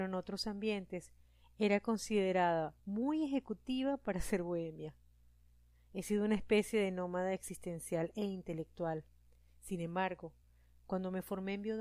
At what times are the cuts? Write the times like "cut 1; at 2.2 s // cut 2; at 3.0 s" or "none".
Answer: none